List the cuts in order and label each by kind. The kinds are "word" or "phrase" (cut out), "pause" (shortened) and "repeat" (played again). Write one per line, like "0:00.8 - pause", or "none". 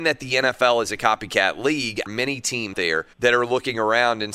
0:02.1 - phrase
0:02.7 - word
0:03.1 - pause